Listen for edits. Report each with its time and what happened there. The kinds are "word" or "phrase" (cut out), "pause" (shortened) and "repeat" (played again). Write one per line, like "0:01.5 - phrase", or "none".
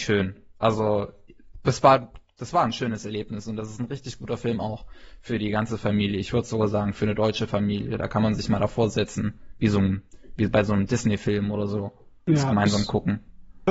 none